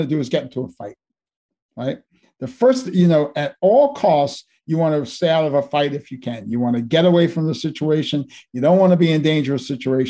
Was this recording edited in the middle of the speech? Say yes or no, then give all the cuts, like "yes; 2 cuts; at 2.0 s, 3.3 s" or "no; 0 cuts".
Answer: no; 0 cuts